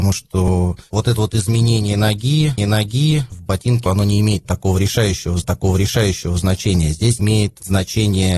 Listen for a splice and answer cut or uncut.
cut